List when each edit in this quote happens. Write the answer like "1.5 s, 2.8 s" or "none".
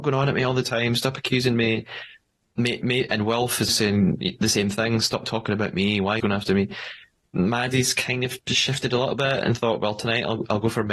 3.7 s, 6.2 s